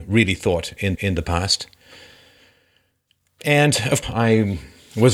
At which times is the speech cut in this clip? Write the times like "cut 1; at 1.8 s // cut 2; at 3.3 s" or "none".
cut 1; at 0.9 s // cut 2; at 4.0 s

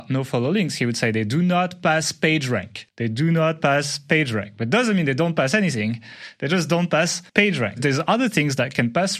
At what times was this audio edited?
cut 1; at 2.9 s // cut 2; at 7.3 s

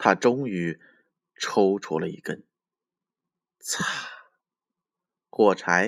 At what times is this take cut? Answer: none

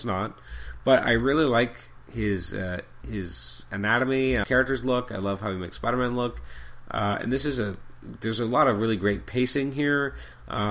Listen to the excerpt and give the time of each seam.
cut 1; at 4.4 s

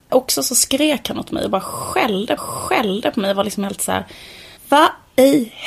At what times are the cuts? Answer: cut 1; at 2.4 s // cut 2; at 4.6 s

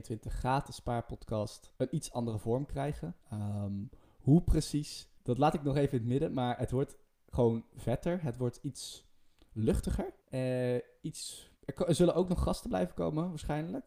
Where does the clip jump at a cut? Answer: cut 1; at 1.8 s // cut 2; at 3.2 s // cut 3; at 5.2 s // cut 4; at 10.2 s // cut 5; at 11.6 s

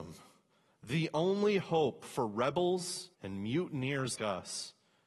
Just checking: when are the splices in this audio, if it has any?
cut 1; at 3.1 s // cut 2; at 4.2 s

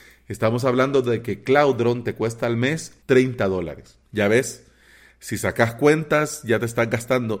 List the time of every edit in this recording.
cut 1; at 3.0 s // cut 2; at 4.1 s

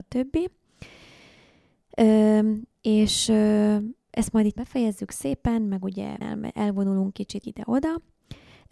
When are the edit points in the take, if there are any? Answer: cut 1; at 4.6 s // cut 2; at 6.2 s // cut 3; at 7.1 s // cut 4; at 7.4 s

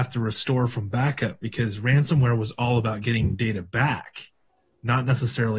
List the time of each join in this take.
none

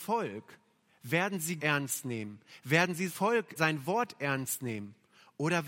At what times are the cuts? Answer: cut 1; at 1.6 s // cut 2; at 3.1 s // cut 3; at 3.6 s

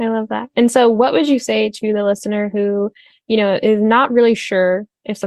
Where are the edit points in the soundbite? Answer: none

